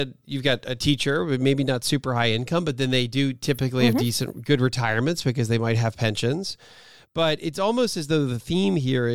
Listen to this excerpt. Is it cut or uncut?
uncut